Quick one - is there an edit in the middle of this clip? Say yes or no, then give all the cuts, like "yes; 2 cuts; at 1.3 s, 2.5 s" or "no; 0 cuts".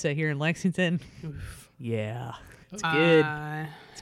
yes; 1 cut; at 2.6 s